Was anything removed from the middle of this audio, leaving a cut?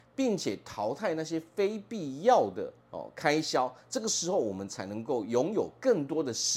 yes; 1 cut; at 2.8 s

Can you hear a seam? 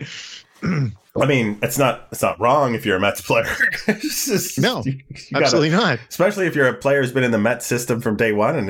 yes; 1 cut; at 1.1 s

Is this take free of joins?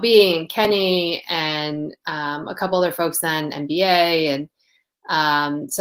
yes; 0 cuts

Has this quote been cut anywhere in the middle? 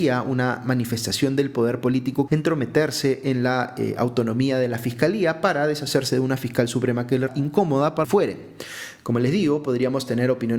yes; 3 cuts; at 2.3 s, 7.3 s, 8.0 s

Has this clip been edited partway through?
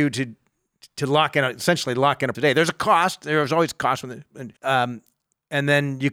yes; 2 cuts; at 2.3 s, 4.6 s

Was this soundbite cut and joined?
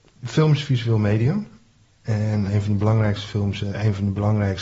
yes; 2 cuts; at 2.5 s, 3.6 s

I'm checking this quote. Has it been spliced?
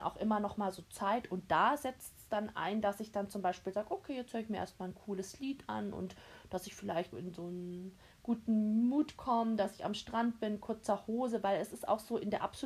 yes; 1 cut; at 7.1 s

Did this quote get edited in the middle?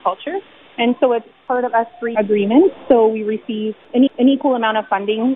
yes; 2 cuts; at 2.1 s, 4.1 s

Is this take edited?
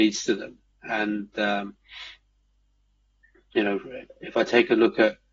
yes; 1 cut; at 4.1 s

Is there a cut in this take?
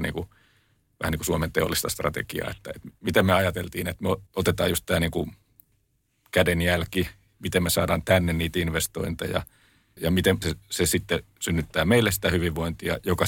yes; 3 cuts; at 4.3 s, 10.0 s, 10.4 s

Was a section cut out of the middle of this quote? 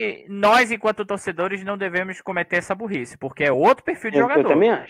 no; 0 cuts

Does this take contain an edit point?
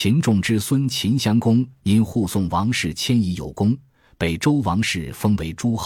no; 0 cuts

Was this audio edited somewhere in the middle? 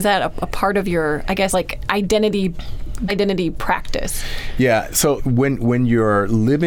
yes; 3 cuts; at 1.5 s, 3.1 s, 5.2 s

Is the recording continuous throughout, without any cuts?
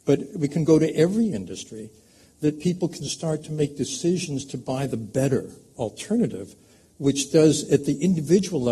yes; 0 cuts

